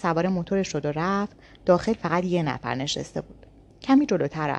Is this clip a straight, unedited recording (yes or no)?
yes